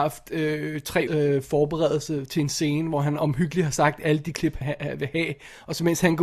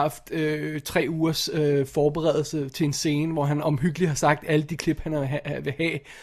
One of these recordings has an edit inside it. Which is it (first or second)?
first